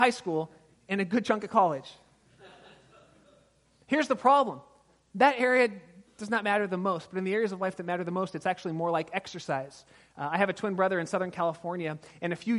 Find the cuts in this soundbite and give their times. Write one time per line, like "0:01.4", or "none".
none

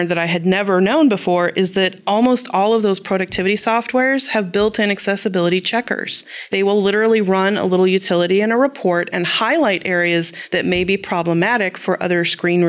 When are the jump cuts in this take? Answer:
none

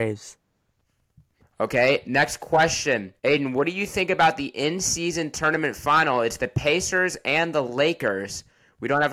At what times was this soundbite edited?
0:03.2

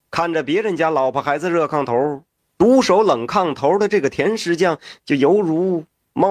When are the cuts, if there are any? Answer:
0:02.4

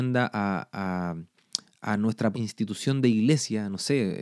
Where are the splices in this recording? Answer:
0:02.3

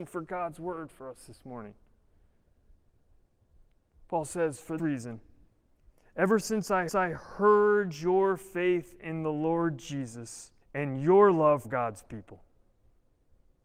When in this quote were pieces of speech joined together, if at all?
0:04.8
0:06.9
0:10.6
0:11.6

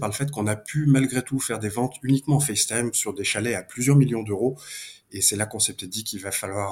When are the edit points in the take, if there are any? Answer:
none

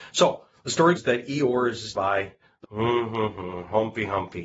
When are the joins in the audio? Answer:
0:01.0
0:01.9
0:02.6

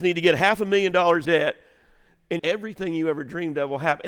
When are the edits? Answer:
0:01.2
0:02.4

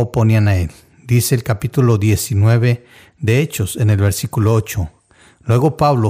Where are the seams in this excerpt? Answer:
none

